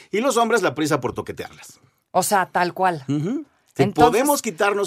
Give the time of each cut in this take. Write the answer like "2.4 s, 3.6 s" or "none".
none